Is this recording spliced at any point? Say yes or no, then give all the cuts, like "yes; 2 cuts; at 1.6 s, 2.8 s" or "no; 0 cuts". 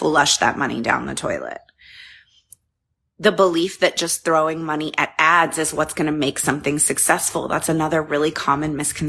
no; 0 cuts